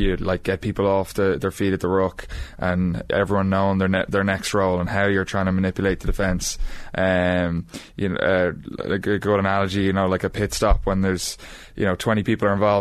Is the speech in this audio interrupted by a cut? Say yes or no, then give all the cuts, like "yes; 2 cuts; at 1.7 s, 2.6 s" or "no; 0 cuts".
no; 0 cuts